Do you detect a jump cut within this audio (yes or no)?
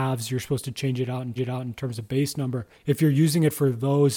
yes